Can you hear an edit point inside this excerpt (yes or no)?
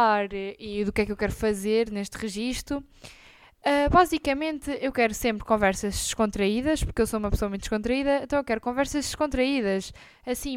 no